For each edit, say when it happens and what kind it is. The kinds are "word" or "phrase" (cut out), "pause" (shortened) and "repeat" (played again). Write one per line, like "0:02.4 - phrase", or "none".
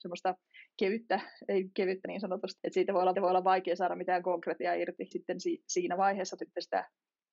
0:02.0 - phrase
0:02.6 - word
0:03.1 - repeat
0:05.1 - word
0:06.4 - word